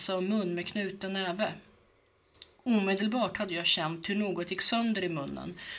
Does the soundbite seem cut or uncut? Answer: uncut